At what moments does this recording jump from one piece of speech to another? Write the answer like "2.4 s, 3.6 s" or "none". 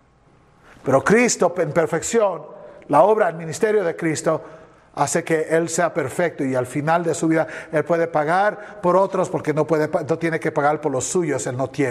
none